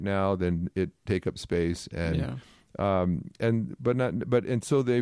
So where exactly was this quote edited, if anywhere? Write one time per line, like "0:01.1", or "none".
none